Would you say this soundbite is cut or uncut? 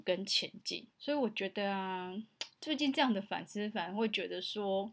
cut